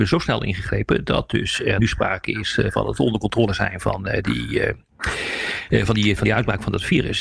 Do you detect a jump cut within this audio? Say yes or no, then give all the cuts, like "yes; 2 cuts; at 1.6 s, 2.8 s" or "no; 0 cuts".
no; 0 cuts